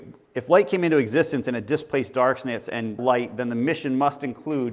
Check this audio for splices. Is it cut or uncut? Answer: cut